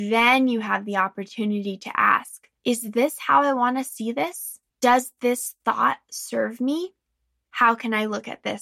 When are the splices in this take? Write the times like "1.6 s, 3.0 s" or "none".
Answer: 2.6 s, 4.7 s